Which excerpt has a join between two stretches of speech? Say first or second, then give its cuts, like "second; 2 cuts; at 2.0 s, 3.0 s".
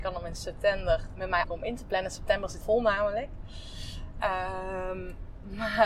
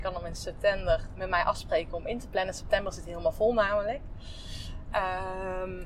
first; 2 cuts; at 1.4 s, 2.6 s